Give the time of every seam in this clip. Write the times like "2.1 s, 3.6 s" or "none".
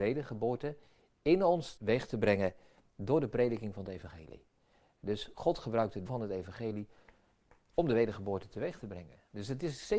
1.8 s, 6.1 s